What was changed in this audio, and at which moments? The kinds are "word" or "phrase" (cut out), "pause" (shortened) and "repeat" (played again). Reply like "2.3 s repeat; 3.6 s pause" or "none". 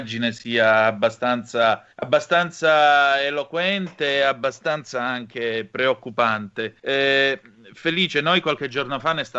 1.9 s pause; 6.8 s pause

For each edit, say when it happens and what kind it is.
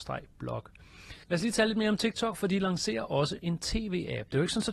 1.2 s pause

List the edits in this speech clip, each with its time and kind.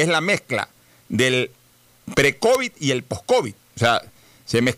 3.6 s pause

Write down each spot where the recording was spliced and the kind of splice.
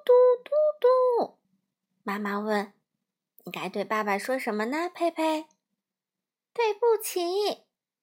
1.4 s pause

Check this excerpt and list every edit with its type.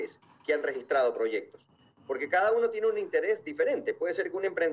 none

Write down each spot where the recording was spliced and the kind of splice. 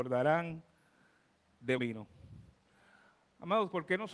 1.8 s word

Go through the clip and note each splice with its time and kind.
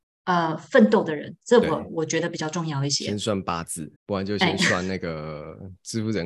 4.0 s pause

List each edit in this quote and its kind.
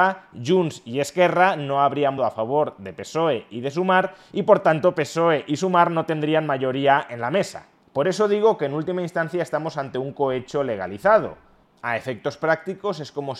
2.2 s word

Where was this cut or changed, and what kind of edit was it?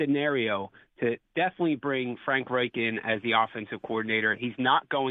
none

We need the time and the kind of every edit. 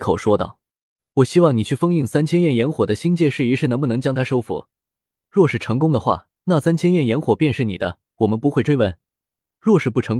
6.4 s pause; 8.1 s pause

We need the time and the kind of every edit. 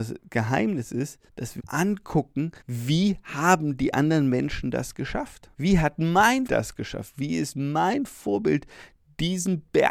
1.3 s pause; 1.6 s word; 2.6 s pause; 5.5 s pause; 6.5 s word

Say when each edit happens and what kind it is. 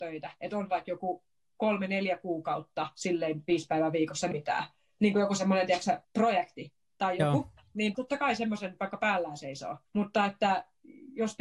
4.3 s phrase; 6.0 s pause; 7.9 s word; 9.9 s pause

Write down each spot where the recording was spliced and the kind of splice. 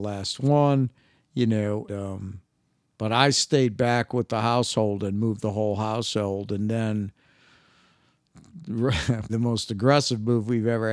1.9 s word; 9.3 s word

